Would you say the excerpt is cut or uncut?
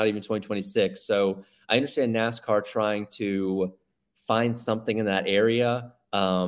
uncut